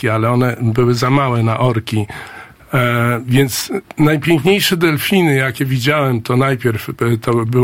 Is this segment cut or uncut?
cut